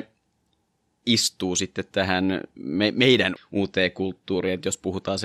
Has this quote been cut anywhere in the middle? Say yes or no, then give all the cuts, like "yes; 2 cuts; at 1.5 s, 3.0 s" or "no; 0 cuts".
yes; 2 cuts; at 1.9 s, 3.4 s